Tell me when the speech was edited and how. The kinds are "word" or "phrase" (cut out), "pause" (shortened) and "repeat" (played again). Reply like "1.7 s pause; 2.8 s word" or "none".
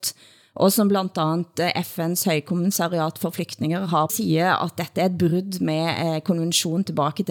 4.1 s phrase